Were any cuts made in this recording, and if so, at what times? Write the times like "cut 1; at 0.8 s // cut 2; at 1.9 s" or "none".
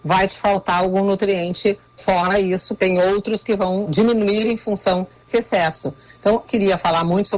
cut 1; at 2.0 s // cut 2; at 2.8 s // cut 3; at 3.9 s // cut 4; at 5.3 s // cut 5; at 6.4 s